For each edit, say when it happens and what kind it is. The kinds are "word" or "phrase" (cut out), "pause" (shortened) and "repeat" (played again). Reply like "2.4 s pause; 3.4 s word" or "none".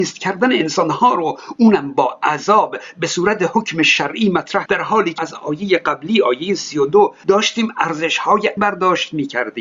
4.7 s word; 5.2 s word; 8.6 s word

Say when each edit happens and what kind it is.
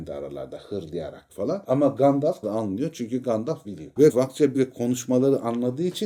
1.3 s word; 2.4 s word; 3.6 s word; 4.1 s word; 4.5 s word

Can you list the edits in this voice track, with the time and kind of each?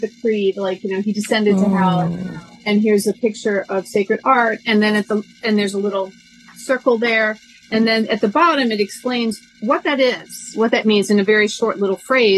none

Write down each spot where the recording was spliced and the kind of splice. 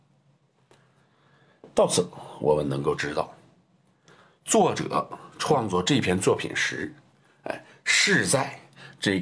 none

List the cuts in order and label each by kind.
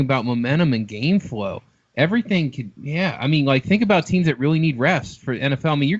none

